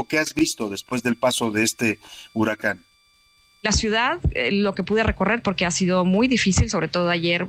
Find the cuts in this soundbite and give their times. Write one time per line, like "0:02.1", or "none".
none